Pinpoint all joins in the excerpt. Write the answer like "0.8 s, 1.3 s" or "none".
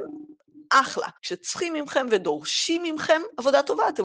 1.2 s